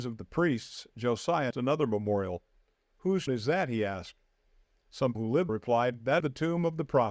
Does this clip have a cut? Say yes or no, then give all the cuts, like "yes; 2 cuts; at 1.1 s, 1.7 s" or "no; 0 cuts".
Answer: yes; 5 cuts; at 1.5 s, 3.3 s, 5.1 s, 5.5 s, 6.2 s